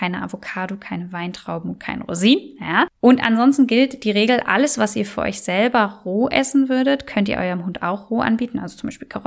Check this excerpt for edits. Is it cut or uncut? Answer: cut